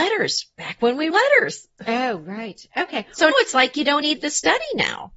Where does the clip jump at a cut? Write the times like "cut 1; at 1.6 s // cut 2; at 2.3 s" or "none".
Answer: cut 1; at 1.1 s // cut 2; at 3.3 s // cut 3; at 4.0 s